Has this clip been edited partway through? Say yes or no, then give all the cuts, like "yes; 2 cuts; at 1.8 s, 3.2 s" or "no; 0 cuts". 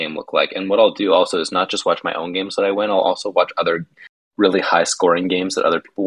no; 0 cuts